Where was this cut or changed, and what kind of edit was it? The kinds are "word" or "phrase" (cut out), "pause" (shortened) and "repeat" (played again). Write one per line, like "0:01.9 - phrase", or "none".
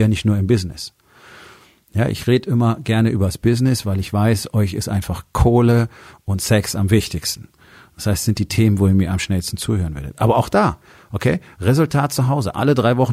none